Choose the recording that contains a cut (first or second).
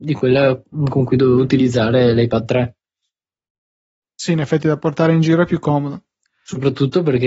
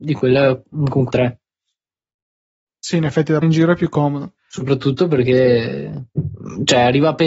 second